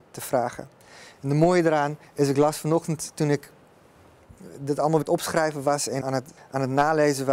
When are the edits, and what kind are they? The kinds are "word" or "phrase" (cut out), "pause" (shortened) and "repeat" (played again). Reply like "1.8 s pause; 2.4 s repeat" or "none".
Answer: 2.1 s pause; 5.0 s word; 6.0 s word; 6.4 s pause